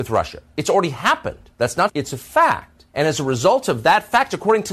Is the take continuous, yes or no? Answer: no